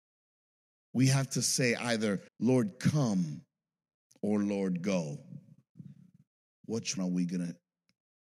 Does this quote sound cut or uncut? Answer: cut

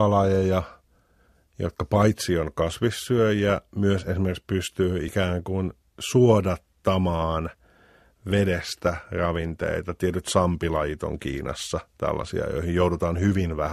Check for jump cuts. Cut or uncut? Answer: uncut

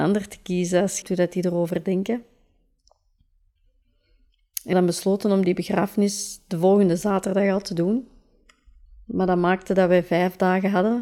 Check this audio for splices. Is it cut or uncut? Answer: cut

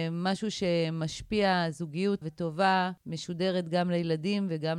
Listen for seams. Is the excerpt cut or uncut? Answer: cut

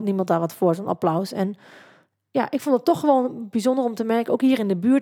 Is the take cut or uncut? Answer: uncut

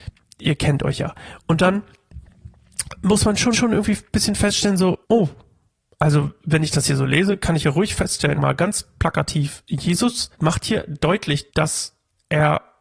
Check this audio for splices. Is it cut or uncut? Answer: cut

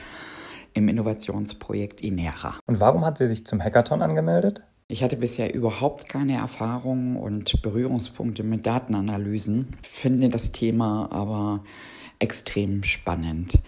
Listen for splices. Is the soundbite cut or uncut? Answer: uncut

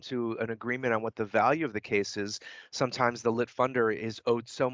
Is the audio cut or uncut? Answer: uncut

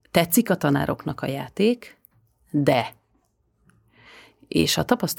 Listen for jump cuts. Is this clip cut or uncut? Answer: uncut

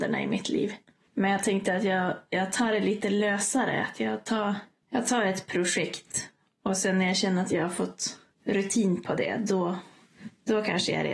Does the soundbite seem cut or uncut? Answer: uncut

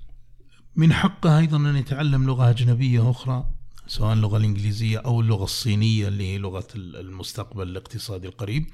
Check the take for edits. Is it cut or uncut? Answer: uncut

